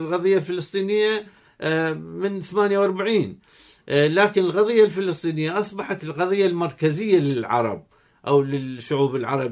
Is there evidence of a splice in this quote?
no; 0 cuts

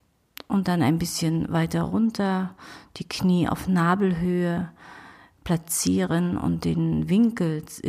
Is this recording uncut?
yes; 0 cuts

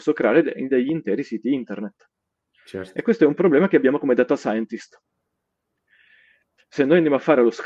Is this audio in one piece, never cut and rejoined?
yes; 0 cuts

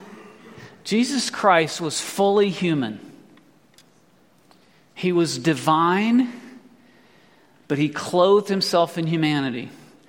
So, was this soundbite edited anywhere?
no; 0 cuts

